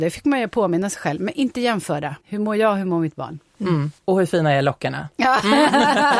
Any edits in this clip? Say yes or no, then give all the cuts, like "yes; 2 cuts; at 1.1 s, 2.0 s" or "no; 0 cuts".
yes; 2 cuts; at 2.2 s, 4.0 s